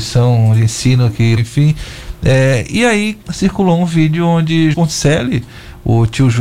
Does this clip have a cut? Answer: yes; 3 cuts; at 1.4 s, 3.2 s, 4.7 s

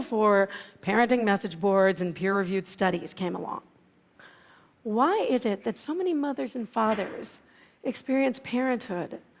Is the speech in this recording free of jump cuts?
yes; 0 cuts

